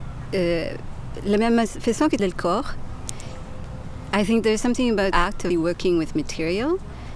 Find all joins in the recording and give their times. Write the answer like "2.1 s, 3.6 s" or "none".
2.2 s, 5.1 s, 5.5 s